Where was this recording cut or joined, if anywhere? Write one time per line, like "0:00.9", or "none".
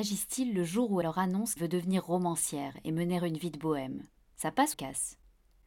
0:01.0
0:01.6
0:04.7